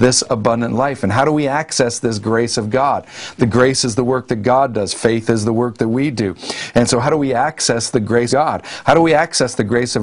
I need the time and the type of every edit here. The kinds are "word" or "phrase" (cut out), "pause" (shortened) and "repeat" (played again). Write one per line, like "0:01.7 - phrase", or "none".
0:08.3 - word